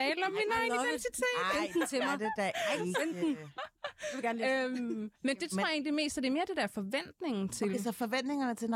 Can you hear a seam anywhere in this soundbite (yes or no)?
yes